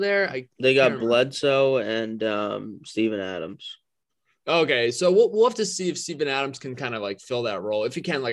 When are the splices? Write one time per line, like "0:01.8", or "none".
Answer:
none